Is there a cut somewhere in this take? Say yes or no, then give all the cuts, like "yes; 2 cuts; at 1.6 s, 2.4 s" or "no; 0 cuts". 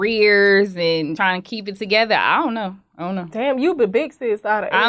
yes; 1 cut; at 1.2 s